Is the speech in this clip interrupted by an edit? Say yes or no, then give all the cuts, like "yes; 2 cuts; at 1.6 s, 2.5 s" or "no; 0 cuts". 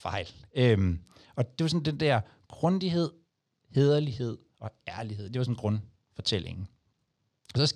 no; 0 cuts